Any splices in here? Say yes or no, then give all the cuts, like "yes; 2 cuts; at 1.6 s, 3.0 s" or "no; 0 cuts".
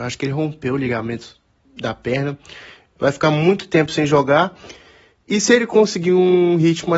no; 0 cuts